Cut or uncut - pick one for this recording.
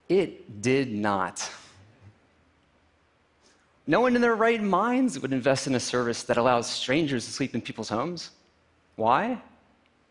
uncut